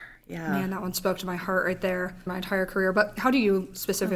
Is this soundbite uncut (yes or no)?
no